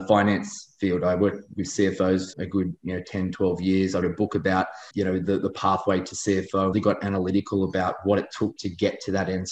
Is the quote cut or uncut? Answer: cut